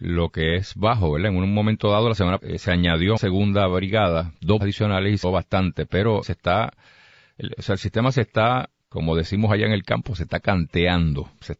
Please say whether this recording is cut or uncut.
cut